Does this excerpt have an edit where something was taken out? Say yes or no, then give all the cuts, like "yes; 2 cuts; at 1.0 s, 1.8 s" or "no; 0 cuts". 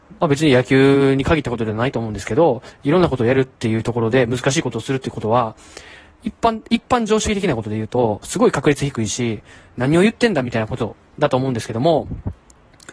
no; 0 cuts